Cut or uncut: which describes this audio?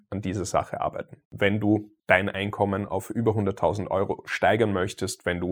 cut